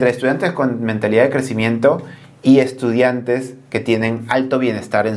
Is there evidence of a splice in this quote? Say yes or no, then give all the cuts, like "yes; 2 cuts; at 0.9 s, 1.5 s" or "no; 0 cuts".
no; 0 cuts